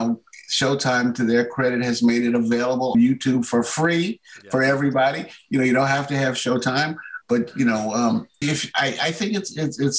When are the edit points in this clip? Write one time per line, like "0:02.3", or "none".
0:02.9
0:07.2
0:08.4